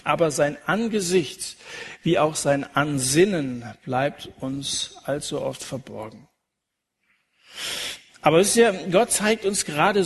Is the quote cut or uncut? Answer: uncut